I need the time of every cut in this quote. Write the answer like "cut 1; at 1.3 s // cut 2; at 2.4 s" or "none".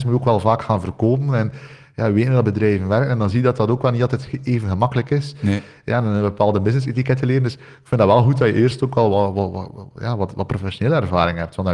none